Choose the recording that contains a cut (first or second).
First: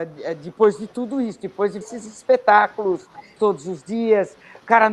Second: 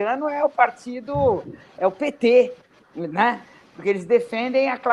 first